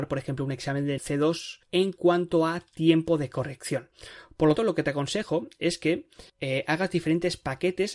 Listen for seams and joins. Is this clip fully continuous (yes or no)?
no